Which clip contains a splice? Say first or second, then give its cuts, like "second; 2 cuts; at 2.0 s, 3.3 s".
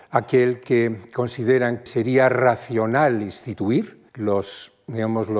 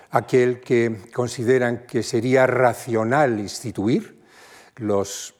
first; 2 cuts; at 1.9 s, 4.1 s